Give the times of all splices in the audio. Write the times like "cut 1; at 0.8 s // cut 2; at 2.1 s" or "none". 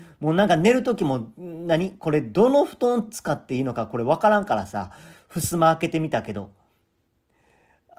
none